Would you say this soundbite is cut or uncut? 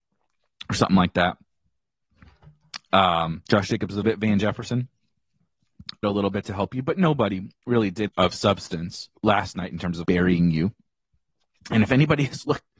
cut